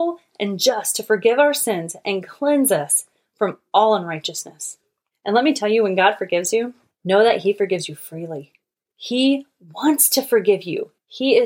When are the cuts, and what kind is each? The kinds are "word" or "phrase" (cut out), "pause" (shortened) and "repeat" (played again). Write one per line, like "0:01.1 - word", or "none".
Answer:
none

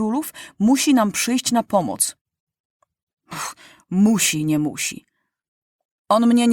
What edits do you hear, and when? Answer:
none

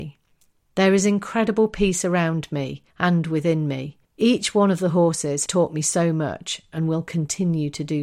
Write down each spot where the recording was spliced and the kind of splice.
0:02.9 - pause
0:04.0 - pause
0:05.5 - word

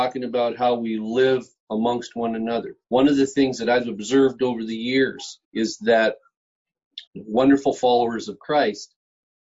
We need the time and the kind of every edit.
0:02.8 - pause
0:05.4 - pause
0:07.1 - pause

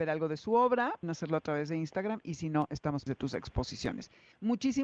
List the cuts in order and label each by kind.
0:01.0 - word
0:03.1 - word

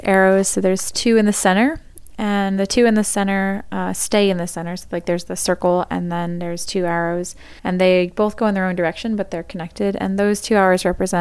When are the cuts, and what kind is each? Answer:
0:07.6 - pause

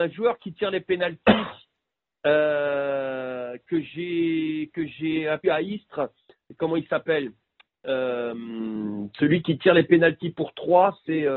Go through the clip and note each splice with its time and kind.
0:05.4 - word

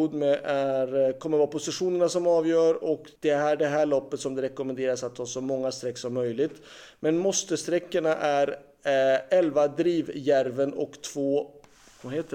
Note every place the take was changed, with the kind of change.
0:03.2 - pause

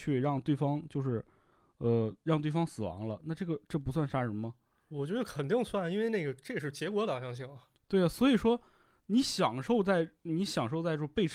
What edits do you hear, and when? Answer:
none

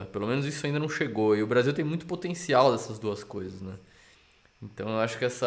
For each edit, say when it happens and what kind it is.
none

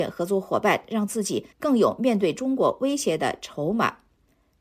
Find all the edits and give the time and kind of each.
0:01.5 - pause

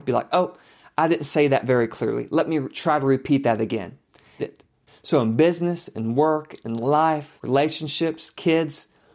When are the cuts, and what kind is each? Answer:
0:04.4 - phrase

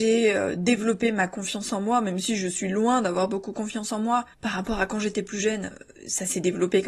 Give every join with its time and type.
0:04.3 - pause

